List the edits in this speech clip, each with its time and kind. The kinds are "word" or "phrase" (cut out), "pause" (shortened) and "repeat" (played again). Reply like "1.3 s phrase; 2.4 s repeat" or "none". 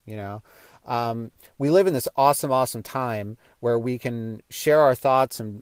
none